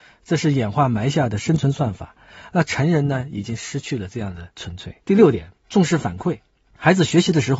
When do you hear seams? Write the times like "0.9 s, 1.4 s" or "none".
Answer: 5.0 s, 5.6 s